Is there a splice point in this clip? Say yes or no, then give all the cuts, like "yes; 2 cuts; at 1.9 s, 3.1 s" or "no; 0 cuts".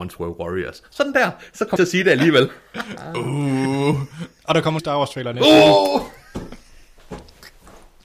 yes; 2 cuts; at 1.8 s, 4.8 s